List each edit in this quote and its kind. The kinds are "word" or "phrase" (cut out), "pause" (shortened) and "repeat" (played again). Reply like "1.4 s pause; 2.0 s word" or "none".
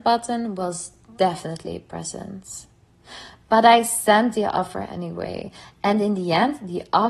none